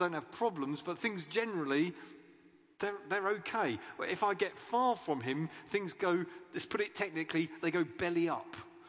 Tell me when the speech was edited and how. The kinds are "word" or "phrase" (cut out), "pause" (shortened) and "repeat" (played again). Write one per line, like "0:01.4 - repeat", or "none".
none